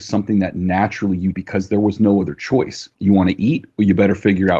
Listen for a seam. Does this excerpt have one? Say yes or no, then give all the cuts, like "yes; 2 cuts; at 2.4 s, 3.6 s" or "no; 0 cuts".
yes; 2 cuts; at 1.3 s, 2.9 s